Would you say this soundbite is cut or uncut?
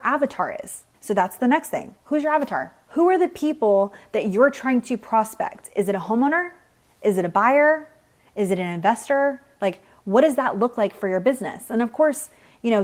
uncut